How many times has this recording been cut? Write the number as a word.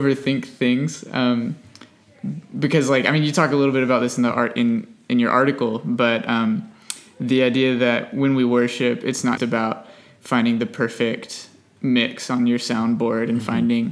one